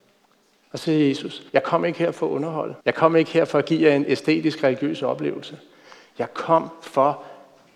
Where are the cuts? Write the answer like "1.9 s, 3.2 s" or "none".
1.5 s, 2.8 s